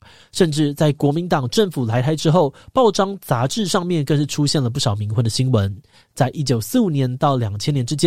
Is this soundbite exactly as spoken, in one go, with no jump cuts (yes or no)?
yes